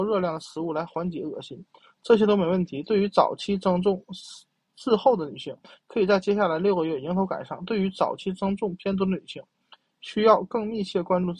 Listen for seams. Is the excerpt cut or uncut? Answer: uncut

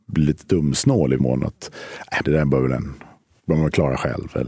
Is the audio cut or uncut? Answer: cut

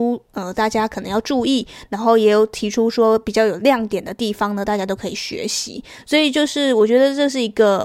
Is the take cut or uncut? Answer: uncut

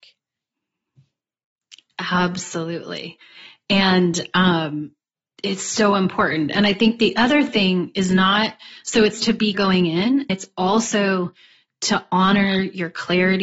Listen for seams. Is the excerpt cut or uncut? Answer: cut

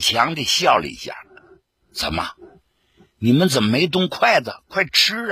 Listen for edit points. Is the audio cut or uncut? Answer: uncut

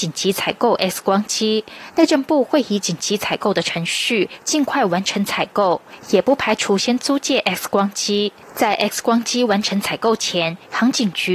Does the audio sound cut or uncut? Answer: uncut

